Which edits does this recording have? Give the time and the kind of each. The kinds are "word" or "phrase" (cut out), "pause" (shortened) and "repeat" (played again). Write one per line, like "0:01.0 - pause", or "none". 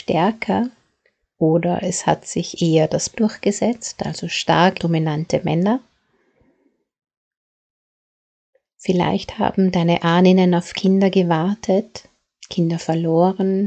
0:03.1 - word
0:04.8 - word